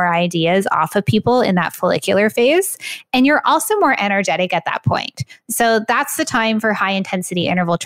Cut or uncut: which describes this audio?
uncut